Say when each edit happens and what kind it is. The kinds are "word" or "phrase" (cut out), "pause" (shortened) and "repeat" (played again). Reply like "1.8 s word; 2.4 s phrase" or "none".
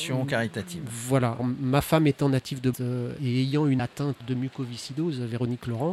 1.4 s word; 2.7 s word; 3.2 s word; 3.8 s word; 4.2 s word